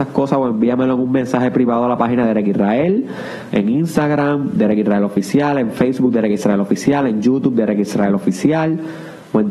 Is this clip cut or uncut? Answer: uncut